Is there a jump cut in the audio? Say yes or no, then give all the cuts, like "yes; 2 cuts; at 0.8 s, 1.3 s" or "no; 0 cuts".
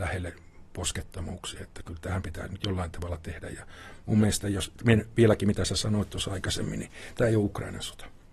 no; 0 cuts